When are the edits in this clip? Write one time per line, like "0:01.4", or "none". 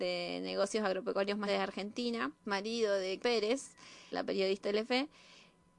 0:01.5
0:02.4
0:03.2
0:04.1
0:04.6